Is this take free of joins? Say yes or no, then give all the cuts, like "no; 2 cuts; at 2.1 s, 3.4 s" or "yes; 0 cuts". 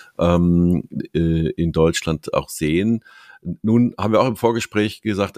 yes; 0 cuts